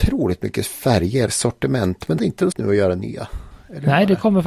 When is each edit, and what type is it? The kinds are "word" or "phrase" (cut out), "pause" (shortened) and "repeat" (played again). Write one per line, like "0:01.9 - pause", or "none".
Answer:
0:01.3 - word
0:02.2 - word
0:02.5 - word